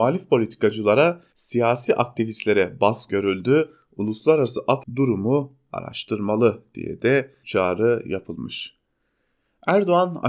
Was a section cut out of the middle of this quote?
yes; 4 cuts; at 1.3 s, 3.1 s, 4.8 s, 7.4 s

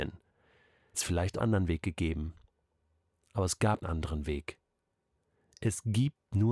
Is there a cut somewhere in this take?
yes; 3 cuts; at 0.9 s, 1.4 s, 3.8 s

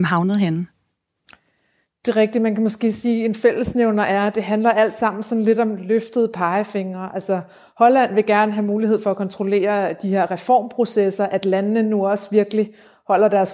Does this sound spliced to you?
no; 0 cuts

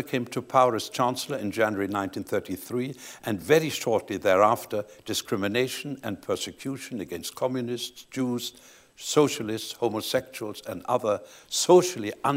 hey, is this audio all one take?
yes; 0 cuts

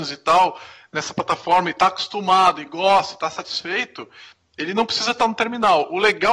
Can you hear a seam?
no; 0 cuts

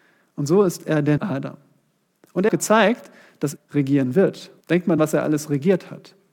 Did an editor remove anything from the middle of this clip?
yes; 5 cuts; at 1.2 s, 2.5 s, 3.6 s, 4.6 s, 5.0 s

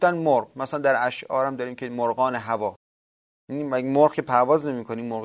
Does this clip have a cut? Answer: no; 0 cuts

